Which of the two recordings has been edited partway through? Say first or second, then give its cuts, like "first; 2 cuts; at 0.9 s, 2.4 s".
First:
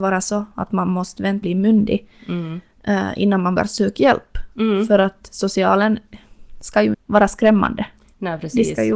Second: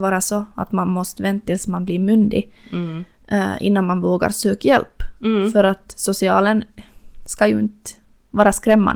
first; 3 cuts; at 1.4 s, 3.6 s, 6.9 s